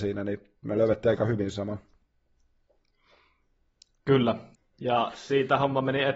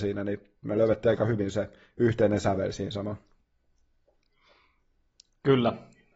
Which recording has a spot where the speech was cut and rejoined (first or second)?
first